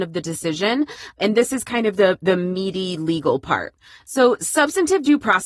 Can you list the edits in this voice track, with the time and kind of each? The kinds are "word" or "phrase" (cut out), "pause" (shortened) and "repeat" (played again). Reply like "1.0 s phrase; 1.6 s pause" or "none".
none